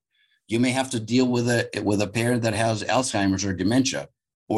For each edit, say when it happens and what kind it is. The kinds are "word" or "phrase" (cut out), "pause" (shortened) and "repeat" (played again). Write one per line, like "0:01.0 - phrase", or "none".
none